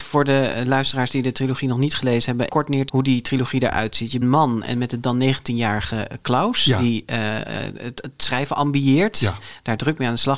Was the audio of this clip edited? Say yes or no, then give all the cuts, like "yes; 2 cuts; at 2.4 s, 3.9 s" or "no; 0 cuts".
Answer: yes; 3 cuts; at 2.5 s, 2.9 s, 4.2 s